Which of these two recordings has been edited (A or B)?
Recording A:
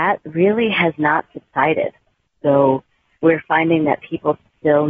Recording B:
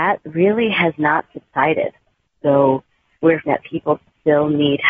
B